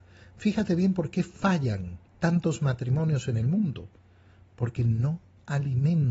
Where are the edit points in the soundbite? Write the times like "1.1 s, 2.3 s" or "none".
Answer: 2.1 s